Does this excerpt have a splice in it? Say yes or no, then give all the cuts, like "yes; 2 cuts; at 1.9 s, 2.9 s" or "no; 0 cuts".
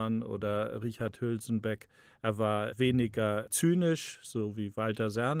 no; 0 cuts